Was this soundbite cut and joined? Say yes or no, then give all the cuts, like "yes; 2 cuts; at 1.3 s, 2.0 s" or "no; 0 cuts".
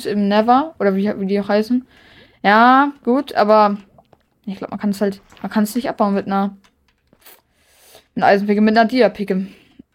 no; 0 cuts